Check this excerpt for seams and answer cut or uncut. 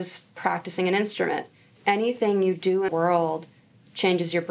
cut